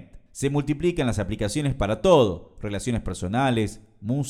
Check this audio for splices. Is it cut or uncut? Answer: uncut